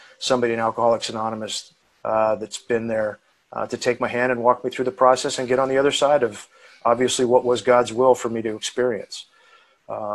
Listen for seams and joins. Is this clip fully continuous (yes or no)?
yes